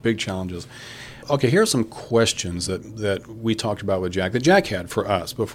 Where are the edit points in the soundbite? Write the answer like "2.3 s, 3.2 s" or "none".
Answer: none